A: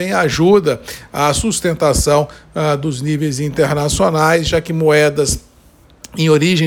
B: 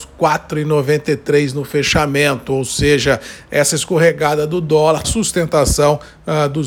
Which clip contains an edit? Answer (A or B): B